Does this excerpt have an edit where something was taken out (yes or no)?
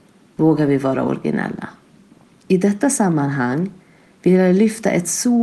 yes